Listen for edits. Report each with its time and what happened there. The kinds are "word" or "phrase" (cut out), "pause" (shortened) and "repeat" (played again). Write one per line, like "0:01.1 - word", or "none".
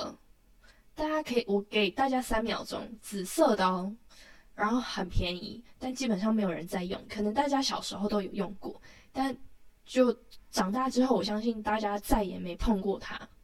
0:09.8 - pause